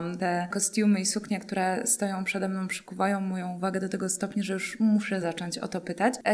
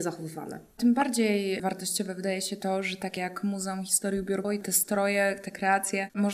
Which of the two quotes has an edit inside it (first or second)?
second